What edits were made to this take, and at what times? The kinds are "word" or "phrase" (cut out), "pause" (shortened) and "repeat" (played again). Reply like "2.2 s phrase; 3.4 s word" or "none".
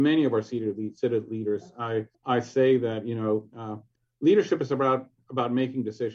2.1 s pause; 3.9 s pause